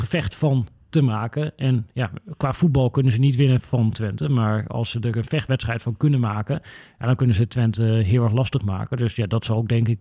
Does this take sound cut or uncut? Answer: uncut